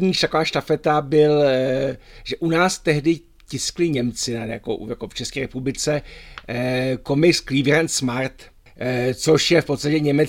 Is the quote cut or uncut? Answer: uncut